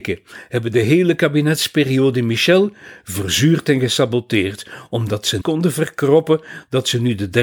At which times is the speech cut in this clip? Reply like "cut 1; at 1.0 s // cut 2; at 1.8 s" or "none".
cut 1; at 5.4 s